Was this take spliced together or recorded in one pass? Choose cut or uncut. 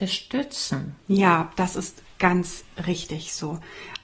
uncut